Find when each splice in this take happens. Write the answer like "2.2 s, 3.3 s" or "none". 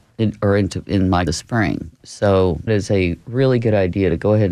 1.3 s, 2.7 s